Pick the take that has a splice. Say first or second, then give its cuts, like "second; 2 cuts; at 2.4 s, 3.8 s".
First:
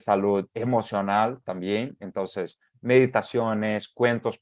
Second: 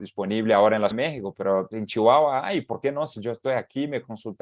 second; 1 cut; at 0.9 s